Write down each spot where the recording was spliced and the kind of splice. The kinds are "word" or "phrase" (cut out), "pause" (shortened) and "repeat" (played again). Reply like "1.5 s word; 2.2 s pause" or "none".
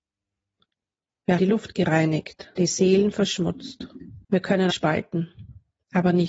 1.4 s word; 2.6 s word; 4.2 s pause; 4.7 s word